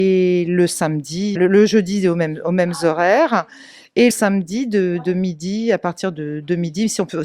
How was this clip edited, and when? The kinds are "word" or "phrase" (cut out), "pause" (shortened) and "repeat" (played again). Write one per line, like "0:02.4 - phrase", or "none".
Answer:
0:01.4 - word
0:04.1 - word